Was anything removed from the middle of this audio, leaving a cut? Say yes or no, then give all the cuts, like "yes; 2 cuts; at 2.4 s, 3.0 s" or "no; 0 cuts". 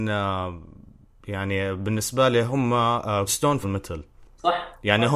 yes; 3 cuts; at 3.3 s, 3.6 s, 4.2 s